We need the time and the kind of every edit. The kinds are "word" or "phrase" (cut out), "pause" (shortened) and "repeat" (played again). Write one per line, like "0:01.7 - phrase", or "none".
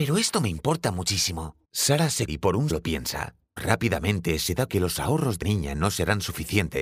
0:01.6 - pause
0:02.3 - word
0:02.7 - word
0:03.6 - word
0:04.7 - phrase
0:05.4 - word